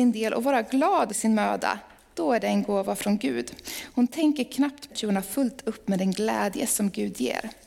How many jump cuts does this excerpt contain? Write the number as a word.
two